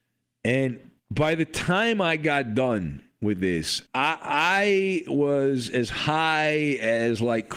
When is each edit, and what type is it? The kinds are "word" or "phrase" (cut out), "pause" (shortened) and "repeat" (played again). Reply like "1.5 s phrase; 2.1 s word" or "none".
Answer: 1.0 s pause; 3.9 s pause